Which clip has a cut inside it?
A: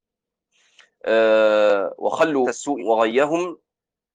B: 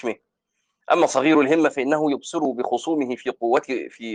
A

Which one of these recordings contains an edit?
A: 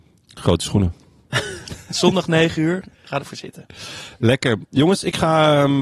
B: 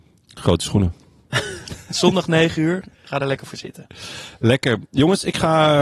A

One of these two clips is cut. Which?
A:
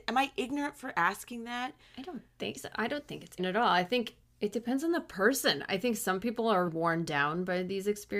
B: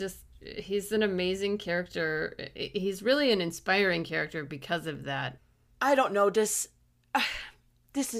A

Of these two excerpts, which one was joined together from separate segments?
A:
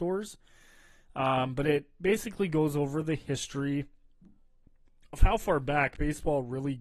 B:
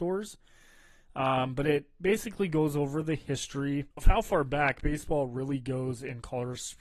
B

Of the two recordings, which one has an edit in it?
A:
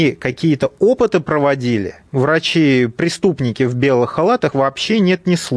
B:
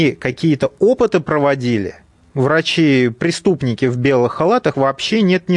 A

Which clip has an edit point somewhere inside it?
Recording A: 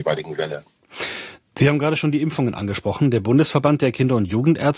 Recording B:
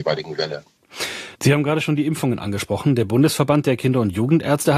B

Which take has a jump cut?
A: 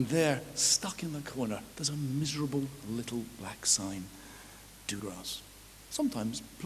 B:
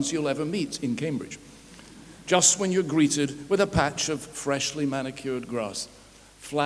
A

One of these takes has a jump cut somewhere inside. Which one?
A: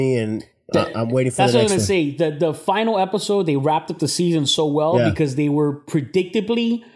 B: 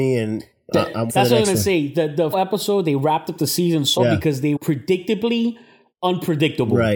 B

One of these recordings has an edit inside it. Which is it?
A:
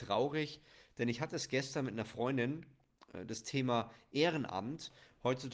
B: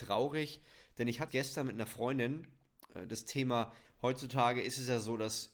B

